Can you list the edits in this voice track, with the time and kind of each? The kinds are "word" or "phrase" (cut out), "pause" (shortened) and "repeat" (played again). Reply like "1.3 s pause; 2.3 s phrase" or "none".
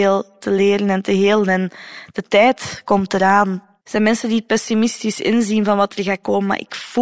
3.8 s pause